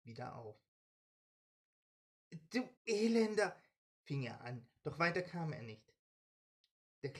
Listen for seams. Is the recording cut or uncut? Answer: cut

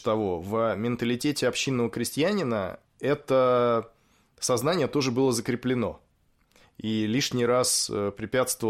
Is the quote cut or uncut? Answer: uncut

